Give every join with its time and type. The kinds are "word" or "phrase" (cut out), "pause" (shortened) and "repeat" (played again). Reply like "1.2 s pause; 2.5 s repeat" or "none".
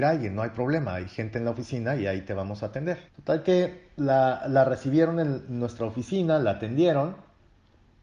3.1 s pause